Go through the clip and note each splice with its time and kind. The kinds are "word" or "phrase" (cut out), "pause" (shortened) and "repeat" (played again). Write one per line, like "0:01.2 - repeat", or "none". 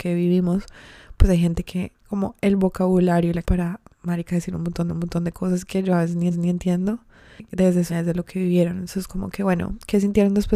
0:02.0 - word
0:03.4 - word
0:03.9 - pause
0:04.9 - repeat
0:06.3 - repeat
0:07.9 - word